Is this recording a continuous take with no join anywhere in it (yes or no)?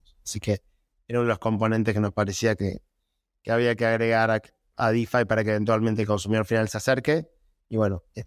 yes